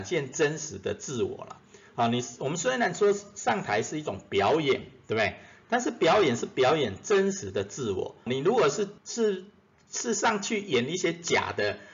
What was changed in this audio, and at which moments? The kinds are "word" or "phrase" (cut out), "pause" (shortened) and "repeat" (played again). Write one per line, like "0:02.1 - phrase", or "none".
0:08.3 - word
0:09.0 - pause